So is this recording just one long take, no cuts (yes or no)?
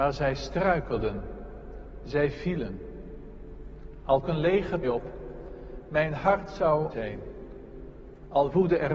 no